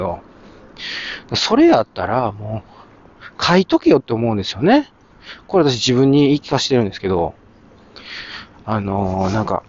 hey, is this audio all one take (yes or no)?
yes